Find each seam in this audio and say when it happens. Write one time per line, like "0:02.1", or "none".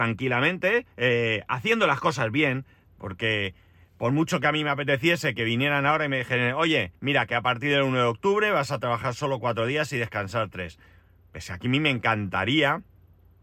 0:00.9
0:06.9